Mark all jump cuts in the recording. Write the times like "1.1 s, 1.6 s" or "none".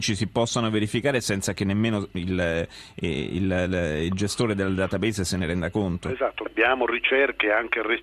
6.5 s

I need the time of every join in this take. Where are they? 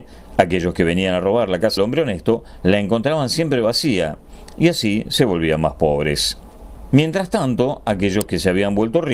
1.8 s

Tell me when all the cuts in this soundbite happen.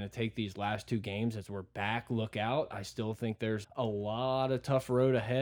3.6 s

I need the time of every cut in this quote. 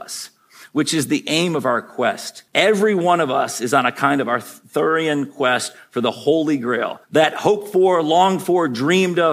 2.5 s, 7.0 s

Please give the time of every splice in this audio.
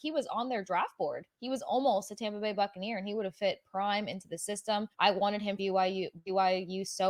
1.3 s, 4.9 s, 5.6 s

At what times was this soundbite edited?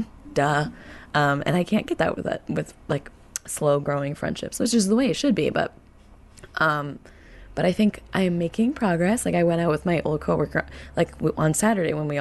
none

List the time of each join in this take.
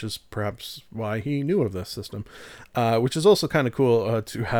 none

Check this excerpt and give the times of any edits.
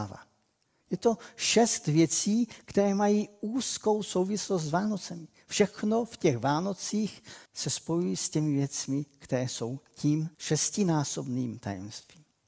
7.5 s, 10.3 s

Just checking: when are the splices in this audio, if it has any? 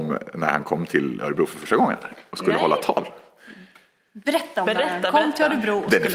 none

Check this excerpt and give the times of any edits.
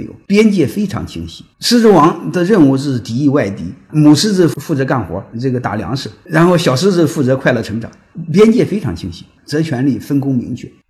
5.3 s

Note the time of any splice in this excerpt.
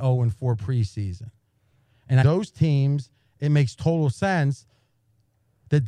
2.2 s

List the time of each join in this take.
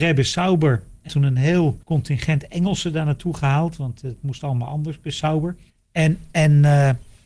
1.1 s, 1.8 s, 5.7 s

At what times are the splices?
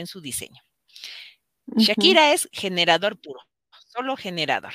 none

